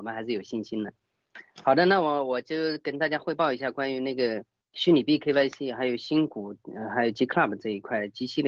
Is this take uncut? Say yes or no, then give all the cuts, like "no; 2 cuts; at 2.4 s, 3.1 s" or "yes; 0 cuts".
no; 1 cut; at 4.6 s